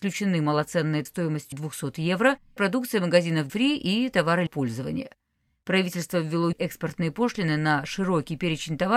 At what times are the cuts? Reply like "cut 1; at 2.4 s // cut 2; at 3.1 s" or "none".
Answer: cut 1; at 1.1 s // cut 2; at 1.5 s // cut 3; at 2.6 s // cut 4; at 3.5 s // cut 5; at 4.5 s // cut 6; at 6.5 s